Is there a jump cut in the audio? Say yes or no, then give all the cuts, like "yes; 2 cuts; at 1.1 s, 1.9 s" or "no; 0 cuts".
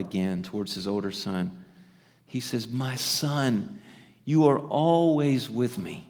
no; 0 cuts